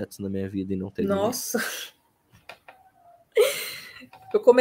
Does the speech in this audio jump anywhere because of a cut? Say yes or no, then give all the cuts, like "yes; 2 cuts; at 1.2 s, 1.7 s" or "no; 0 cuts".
no; 0 cuts